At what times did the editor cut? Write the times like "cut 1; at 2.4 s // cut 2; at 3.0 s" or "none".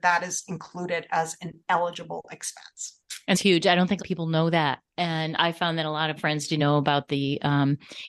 cut 1; at 3.3 s // cut 2; at 4.0 s // cut 3; at 5.4 s // cut 4; at 6.2 s // cut 5; at 6.6 s